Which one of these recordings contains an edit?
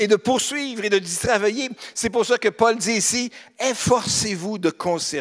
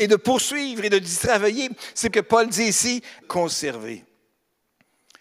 second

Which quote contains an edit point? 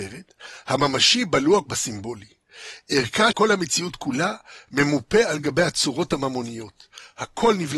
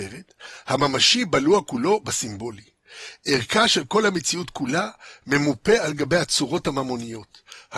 first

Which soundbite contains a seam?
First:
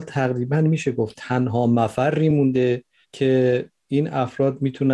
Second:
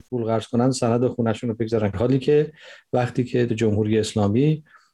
second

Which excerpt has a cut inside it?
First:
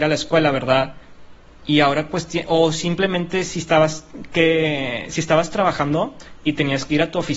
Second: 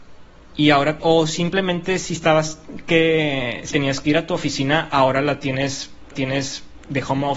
second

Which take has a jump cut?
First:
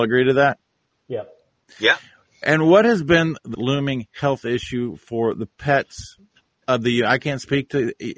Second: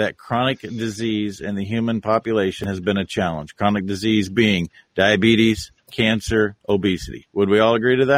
first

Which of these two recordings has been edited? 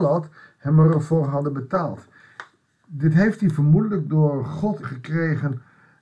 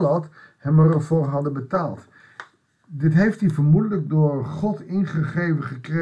first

